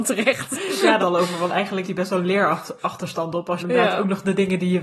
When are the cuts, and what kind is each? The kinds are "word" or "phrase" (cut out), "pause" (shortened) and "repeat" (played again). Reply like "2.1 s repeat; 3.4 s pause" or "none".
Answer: 1.0 s word; 1.8 s word; 3.6 s word